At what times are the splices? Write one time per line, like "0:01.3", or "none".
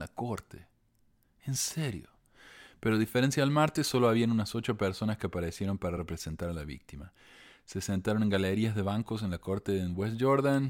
none